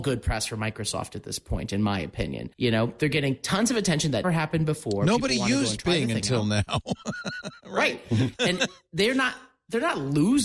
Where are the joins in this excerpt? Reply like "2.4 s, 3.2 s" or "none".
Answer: 2.5 s, 4.2 s